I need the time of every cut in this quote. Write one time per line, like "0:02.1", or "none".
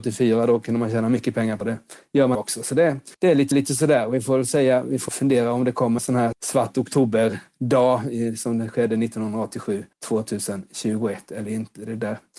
0:01.6
0:02.3
0:03.1
0:03.5
0:05.1
0:06.0
0:06.3
0:09.9